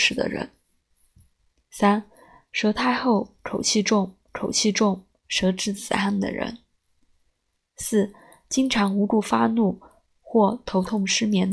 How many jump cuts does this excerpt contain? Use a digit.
1